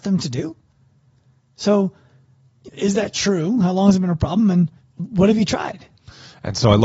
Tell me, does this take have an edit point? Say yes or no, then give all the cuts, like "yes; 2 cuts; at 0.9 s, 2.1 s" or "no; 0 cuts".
yes; 2 cuts; at 2.6 s, 4.8 s